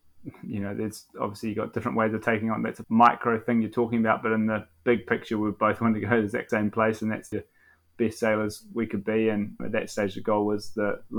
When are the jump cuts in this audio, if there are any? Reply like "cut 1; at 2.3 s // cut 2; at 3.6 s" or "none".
cut 1; at 1.1 s // cut 2; at 2.8 s // cut 3; at 6.5 s // cut 4; at 7.3 s // cut 5; at 9.6 s